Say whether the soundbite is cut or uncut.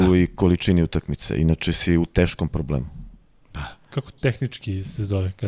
cut